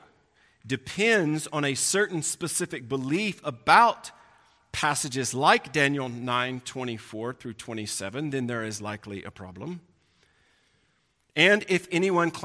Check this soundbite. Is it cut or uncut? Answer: uncut